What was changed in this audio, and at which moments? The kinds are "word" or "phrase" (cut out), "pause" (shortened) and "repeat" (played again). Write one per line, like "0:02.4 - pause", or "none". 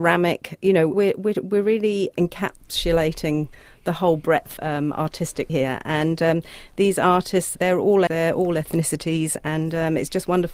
0:00.9 - word
0:02.1 - word
0:04.6 - word
0:05.5 - word
0:07.5 - word
0:08.1 - word